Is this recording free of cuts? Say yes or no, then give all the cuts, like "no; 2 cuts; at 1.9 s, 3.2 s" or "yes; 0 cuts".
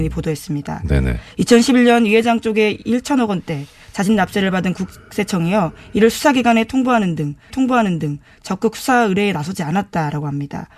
no; 1 cut; at 7.5 s